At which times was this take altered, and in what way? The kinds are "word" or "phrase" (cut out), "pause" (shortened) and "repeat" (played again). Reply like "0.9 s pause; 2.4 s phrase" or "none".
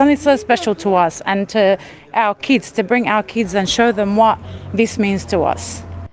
none